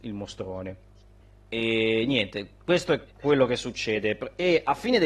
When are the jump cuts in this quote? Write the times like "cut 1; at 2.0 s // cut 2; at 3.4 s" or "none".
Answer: cut 1; at 1.2 s // cut 2; at 3.1 s